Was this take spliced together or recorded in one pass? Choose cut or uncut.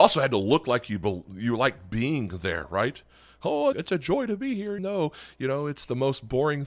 cut